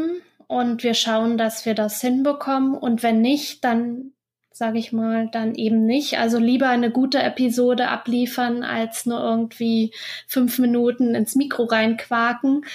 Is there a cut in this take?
no; 0 cuts

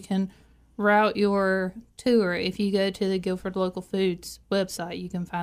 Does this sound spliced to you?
no; 0 cuts

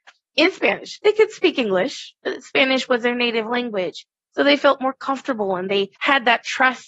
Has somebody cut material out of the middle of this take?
yes; 2 cuts; at 2.2 s, 6.0 s

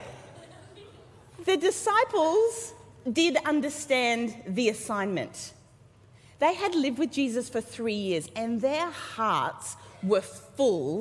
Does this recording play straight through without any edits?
yes; 0 cuts

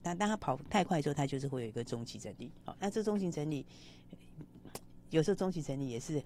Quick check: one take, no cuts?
no; 1 cut; at 2.6 s

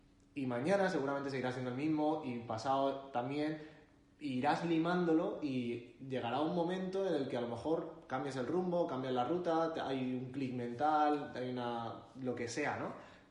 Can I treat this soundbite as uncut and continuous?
yes; 0 cuts

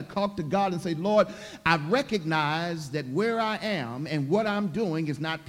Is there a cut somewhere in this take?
no; 0 cuts

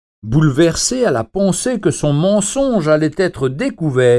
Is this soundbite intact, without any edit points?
yes; 0 cuts

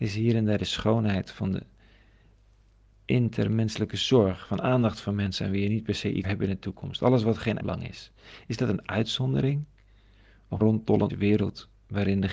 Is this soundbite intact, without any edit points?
no; 4 cuts; at 6.2 s, 7.6 s, 10.6 s, 11.1 s

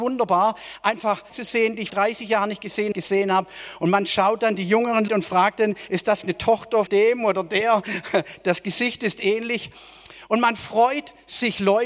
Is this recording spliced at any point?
yes; 6 cuts; at 1.3 s, 1.9 s, 2.9 s, 5.1 s, 6.2 s, 6.9 s

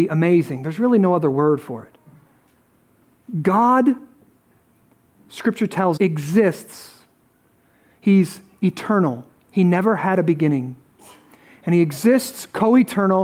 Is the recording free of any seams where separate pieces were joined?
no; 1 cut; at 6.0 s

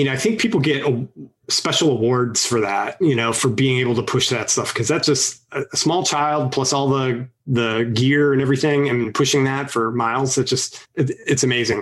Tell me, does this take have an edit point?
no; 0 cuts

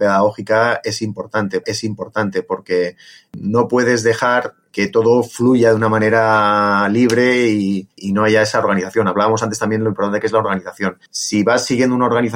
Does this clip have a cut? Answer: yes; 3 cuts; at 1.6 s, 7.9 s, 11.1 s

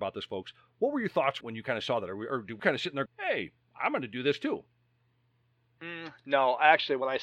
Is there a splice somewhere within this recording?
yes; 3 cuts; at 1.4 s, 2.6 s, 3.1 s

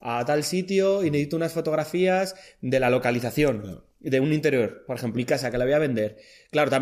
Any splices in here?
yes; 1 cut; at 5.2 s

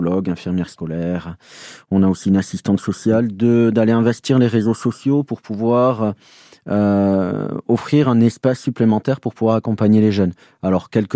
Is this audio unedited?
yes; 0 cuts

